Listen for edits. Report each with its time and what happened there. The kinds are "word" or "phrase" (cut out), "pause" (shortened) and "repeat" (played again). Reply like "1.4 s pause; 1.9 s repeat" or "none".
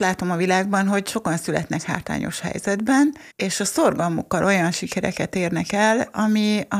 3.3 s pause